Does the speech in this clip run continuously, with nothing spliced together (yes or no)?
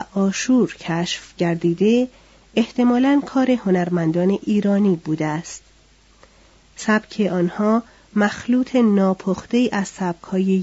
yes